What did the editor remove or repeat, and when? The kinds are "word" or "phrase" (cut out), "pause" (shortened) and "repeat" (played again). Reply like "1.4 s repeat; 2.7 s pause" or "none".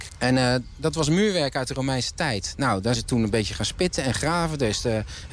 3.0 s word